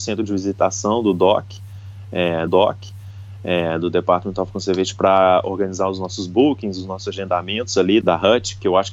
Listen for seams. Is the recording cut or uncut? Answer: cut